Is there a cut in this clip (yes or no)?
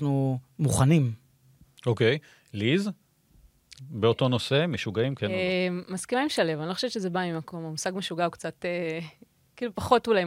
no